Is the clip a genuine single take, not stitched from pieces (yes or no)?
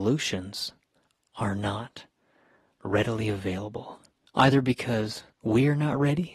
yes